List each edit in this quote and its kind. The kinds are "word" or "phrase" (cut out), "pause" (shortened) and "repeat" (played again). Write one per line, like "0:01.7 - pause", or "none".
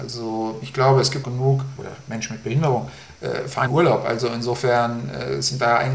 0:01.2 - word
0:03.7 - phrase